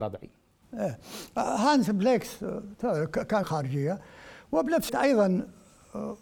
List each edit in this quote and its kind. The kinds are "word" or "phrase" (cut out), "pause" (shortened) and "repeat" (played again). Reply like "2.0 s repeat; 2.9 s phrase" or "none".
3.4 s word; 4.9 s word